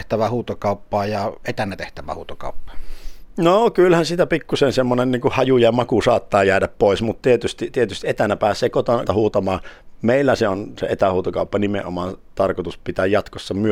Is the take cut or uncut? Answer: cut